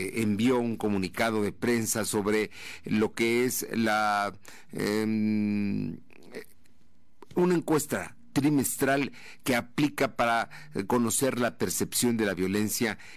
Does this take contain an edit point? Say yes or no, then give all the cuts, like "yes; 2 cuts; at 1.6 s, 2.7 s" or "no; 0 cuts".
no; 0 cuts